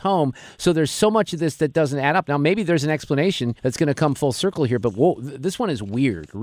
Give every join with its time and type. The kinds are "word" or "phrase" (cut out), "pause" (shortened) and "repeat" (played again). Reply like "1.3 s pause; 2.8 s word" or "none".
3.6 s pause